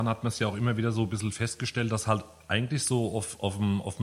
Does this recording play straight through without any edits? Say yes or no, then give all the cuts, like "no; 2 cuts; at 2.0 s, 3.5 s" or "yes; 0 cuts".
yes; 0 cuts